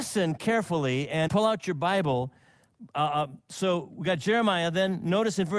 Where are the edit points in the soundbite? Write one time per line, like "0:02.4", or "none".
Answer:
0:01.2